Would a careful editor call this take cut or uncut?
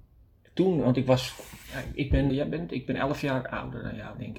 cut